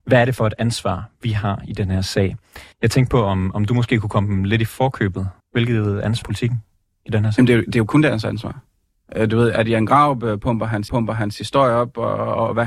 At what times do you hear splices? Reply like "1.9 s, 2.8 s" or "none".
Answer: 2.7 s, 5.4 s, 6.2 s, 10.9 s

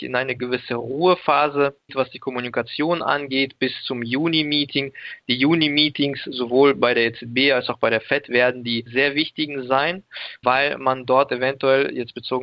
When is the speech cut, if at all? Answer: 1.9 s, 8.9 s

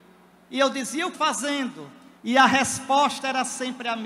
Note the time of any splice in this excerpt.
1.1 s, 2.2 s

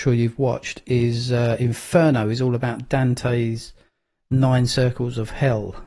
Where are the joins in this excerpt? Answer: none

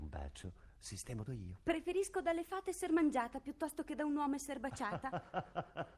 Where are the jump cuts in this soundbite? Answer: 1.3 s

